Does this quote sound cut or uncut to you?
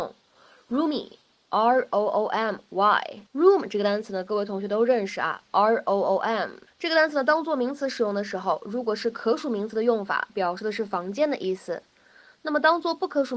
cut